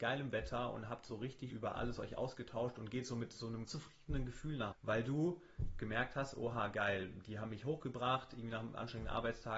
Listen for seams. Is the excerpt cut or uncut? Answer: cut